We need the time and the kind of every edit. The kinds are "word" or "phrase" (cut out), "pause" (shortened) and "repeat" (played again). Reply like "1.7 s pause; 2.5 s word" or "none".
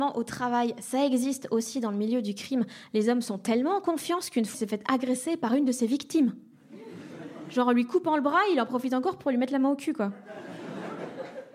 4.5 s word